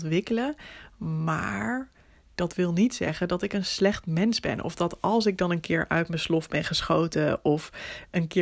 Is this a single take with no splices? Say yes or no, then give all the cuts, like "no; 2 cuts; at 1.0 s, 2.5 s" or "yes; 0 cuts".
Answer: yes; 0 cuts